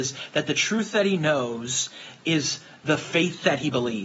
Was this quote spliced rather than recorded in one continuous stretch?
no; 0 cuts

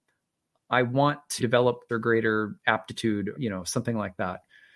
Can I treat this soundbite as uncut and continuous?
no; 3 cuts; at 1.4 s, 1.9 s, 3.3 s

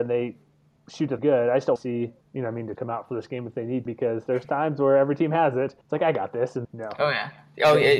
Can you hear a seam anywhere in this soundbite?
yes; 7 cuts; at 1.2 s, 1.8 s, 2.2 s, 2.7 s, 3.9 s, 5.8 s, 6.6 s

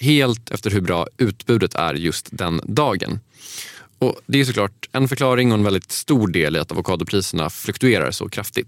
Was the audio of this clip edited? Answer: no; 0 cuts

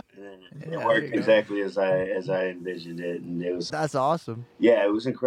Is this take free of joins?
no; 1 cut; at 3.7 s

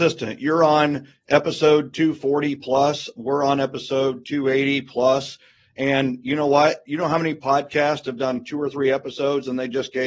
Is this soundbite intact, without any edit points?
yes; 0 cuts

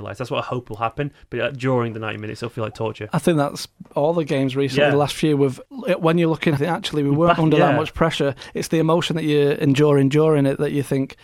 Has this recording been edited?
yes; 2 cuts; at 5.7 s, 6.6 s

